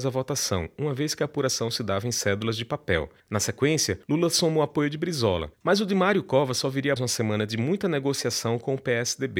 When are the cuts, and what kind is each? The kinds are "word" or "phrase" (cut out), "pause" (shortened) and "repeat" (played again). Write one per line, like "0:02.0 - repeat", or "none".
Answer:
0:03.2 - pause
0:04.0 - pause
0:05.5 - pause
0:07.0 - word